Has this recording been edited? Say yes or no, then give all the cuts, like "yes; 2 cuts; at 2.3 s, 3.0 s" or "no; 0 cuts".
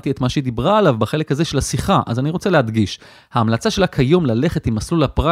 no; 0 cuts